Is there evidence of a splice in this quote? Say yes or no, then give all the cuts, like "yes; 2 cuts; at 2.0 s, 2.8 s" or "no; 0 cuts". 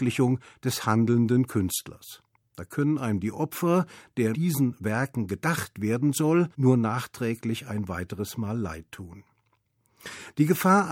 yes; 3 cuts; at 2.3 s, 4.3 s, 6.5 s